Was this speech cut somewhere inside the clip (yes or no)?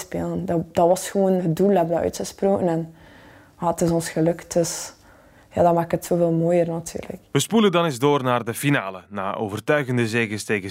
no